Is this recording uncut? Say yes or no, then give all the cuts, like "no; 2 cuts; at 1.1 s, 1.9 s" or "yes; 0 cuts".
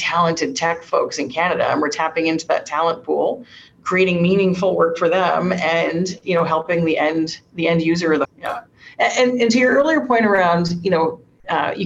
no; 1 cut; at 8.2 s